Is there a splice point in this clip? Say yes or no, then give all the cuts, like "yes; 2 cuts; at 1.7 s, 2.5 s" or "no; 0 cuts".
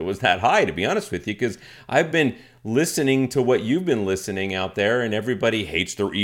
no; 0 cuts